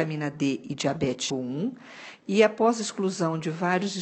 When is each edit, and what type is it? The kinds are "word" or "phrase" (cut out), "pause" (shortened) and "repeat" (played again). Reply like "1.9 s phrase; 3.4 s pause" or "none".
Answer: 1.3 s word